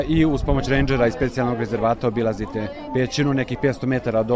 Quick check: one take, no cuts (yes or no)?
yes